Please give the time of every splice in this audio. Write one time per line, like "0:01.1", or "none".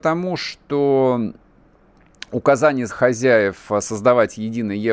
0:02.9

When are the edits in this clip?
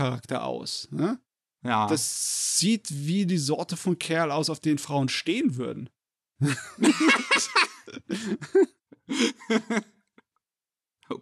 none

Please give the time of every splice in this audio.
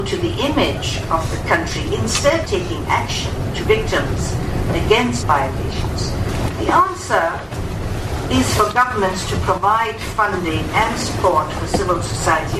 0:02.4
0:03.6
0:05.2

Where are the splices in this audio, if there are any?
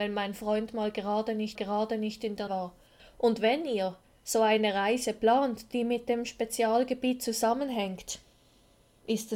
0:01.6
0:02.5
0:04.0

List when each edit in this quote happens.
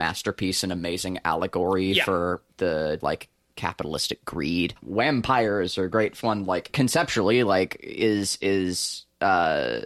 0:03.0
0:04.8
0:06.2

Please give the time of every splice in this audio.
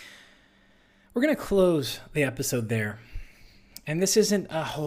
none

